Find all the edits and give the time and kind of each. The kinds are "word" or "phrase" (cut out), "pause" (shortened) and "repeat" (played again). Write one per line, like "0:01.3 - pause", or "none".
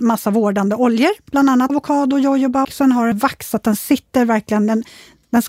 0:01.7 - word
0:02.6 - word
0:03.1 - phrase